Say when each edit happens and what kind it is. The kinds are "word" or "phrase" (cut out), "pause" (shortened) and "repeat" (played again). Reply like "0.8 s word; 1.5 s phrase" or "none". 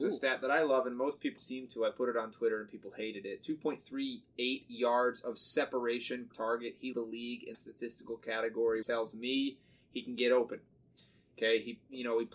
1.4 s word; 6.3 s word; 6.9 s word; 7.5 s word; 8.8 s word